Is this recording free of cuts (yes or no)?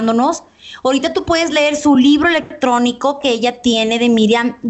yes